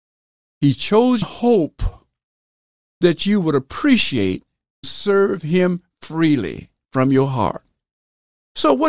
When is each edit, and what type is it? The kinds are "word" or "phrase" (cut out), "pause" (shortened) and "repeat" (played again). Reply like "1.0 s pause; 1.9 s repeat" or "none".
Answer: 1.2 s phrase; 4.8 s word